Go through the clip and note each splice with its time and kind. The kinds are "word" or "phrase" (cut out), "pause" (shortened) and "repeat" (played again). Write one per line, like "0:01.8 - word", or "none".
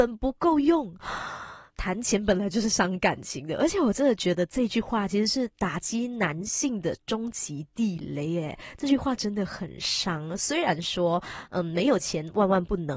0:01.7 - pause